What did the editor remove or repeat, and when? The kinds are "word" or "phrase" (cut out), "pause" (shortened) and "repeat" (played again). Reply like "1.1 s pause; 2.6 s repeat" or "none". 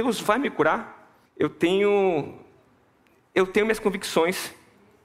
1.3 s pause